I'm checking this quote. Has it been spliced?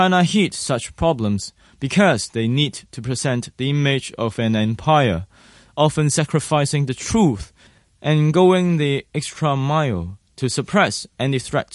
no; 0 cuts

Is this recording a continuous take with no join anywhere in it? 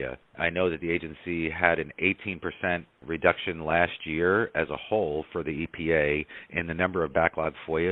yes; 0 cuts

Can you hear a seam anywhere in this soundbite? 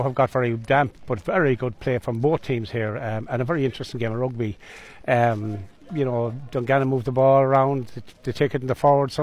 no; 0 cuts

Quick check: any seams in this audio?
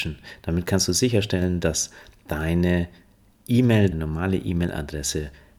yes; 1 cut; at 3.9 s

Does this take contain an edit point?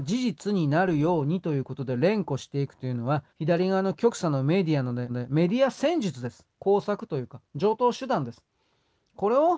yes; 3 cuts; at 3.3 s, 5.1 s, 6.5 s

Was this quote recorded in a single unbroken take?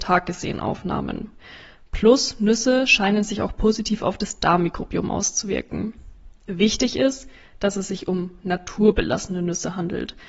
yes; 0 cuts

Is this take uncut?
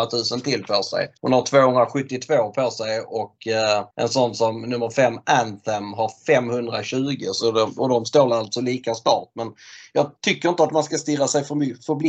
no; 3 cuts; at 1.2 s, 3.9 s, 10.2 s

